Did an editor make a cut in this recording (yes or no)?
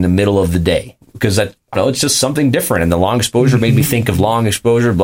yes